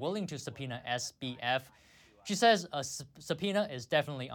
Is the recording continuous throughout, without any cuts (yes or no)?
yes